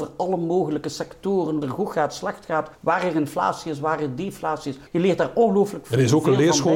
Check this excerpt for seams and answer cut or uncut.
cut